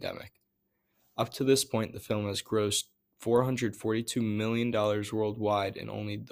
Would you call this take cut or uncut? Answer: uncut